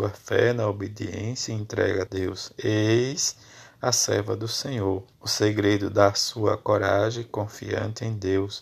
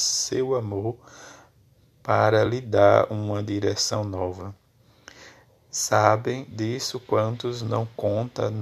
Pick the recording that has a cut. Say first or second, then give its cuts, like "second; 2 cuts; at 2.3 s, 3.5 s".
first; 2 cuts; at 2.1 s, 5.1 s